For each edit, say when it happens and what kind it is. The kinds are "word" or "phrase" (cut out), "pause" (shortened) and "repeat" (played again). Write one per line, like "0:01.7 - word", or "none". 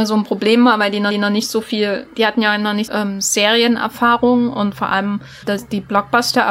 0:01.1 - repeat
0:02.9 - phrase
0:05.4 - word